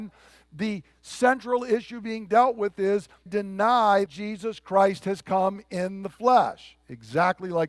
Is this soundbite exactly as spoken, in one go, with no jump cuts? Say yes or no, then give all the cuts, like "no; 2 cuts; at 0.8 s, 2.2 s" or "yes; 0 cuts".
no; 2 cuts; at 3.3 s, 4.1 s